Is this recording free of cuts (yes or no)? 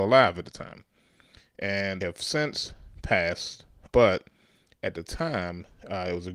no